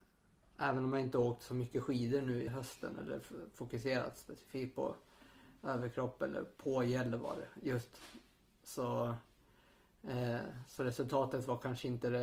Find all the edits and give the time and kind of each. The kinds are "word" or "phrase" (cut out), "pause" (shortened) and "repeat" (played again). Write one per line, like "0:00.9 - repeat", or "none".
0:02.5 - word